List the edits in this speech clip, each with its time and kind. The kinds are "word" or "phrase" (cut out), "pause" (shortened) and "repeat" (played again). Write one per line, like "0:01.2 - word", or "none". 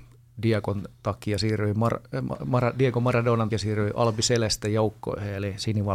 0:02.4 - word
0:03.5 - word